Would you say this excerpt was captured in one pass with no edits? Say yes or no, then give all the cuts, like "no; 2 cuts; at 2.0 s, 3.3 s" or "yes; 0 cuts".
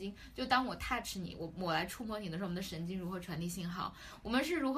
yes; 0 cuts